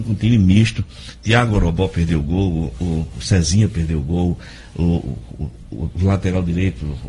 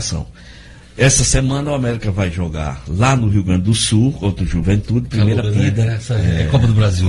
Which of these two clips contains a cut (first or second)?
second